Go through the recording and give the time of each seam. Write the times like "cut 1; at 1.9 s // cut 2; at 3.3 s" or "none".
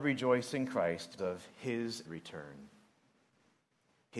cut 1; at 1.2 s // cut 2; at 2.0 s